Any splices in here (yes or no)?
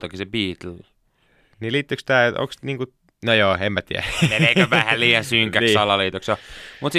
no